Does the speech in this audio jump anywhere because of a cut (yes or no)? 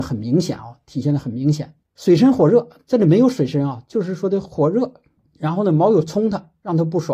no